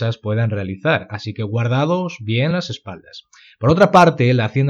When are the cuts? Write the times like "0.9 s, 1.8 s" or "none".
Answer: none